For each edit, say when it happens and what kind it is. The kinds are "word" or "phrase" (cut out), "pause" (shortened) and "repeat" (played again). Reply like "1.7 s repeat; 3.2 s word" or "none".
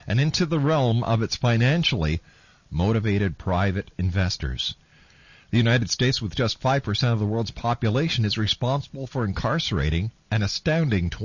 none